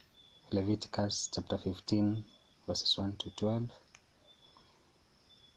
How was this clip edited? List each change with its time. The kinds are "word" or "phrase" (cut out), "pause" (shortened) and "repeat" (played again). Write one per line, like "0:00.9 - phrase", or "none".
0:02.5 - word